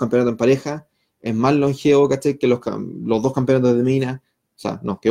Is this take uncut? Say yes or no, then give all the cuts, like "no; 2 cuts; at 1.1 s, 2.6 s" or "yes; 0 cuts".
yes; 0 cuts